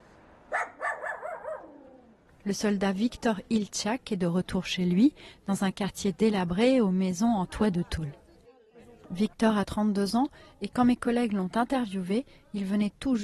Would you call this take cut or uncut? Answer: uncut